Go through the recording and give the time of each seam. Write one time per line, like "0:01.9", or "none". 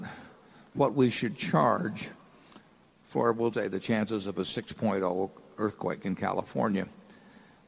0:03.5